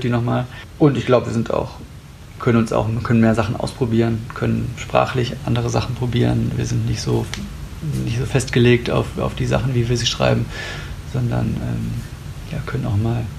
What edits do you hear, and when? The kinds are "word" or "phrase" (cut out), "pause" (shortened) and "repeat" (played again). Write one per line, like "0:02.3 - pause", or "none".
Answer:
none